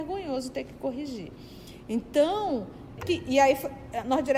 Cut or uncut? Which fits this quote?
cut